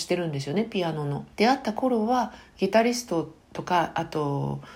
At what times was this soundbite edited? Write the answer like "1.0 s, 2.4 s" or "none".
3.4 s